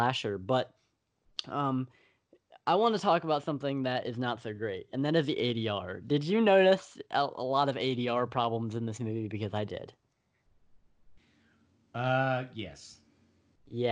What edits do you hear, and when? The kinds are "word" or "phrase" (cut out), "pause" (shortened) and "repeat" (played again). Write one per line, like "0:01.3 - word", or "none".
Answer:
0:09.7 - word